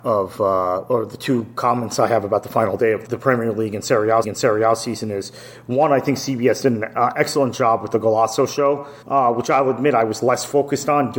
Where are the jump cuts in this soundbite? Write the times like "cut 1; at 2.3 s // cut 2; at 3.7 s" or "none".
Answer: cut 1; at 3.1 s // cut 2; at 4.2 s // cut 3; at 9.0 s

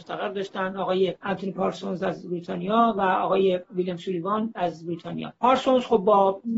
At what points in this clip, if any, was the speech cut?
none

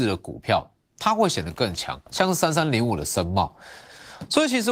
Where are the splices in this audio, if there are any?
cut 1; at 2.1 s

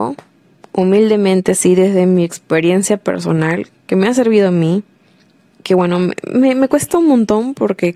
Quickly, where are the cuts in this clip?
none

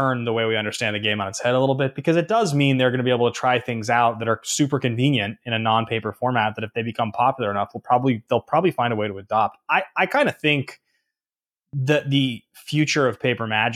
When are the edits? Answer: none

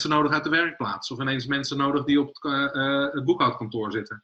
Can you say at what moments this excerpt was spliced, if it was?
none

